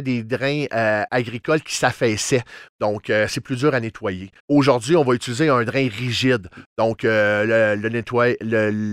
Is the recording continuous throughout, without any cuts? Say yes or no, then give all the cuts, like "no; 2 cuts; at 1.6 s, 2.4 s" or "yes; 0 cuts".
no; 1 cut; at 4.4 s